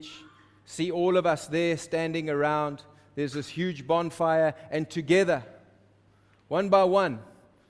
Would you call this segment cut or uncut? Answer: uncut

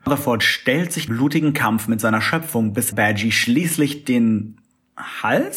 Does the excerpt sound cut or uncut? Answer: cut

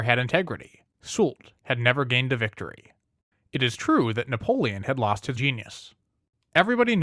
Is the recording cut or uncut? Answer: cut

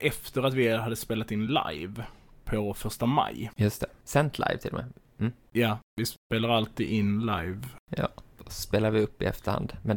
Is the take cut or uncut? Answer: uncut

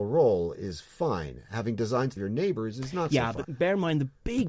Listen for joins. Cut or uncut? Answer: cut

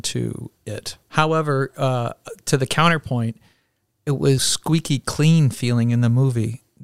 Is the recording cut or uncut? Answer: cut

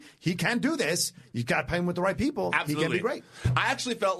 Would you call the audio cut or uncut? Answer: uncut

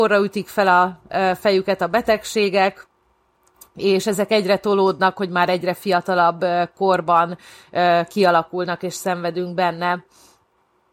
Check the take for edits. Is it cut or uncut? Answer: uncut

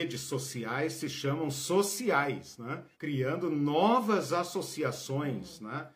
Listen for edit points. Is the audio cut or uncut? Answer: cut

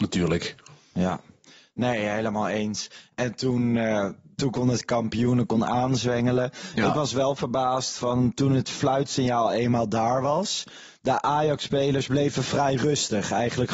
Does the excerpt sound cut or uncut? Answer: cut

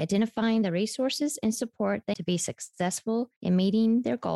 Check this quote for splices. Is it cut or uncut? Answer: cut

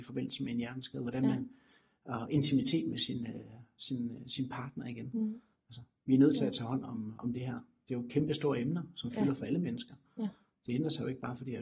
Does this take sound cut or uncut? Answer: uncut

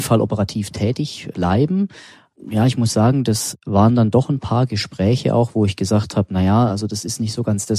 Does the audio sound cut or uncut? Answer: uncut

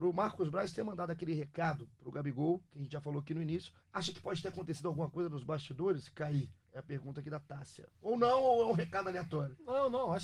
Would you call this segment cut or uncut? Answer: cut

